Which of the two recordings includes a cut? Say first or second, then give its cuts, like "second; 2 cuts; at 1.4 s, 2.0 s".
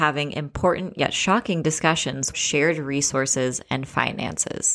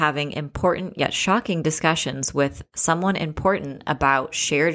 first; 1 cut; at 2.3 s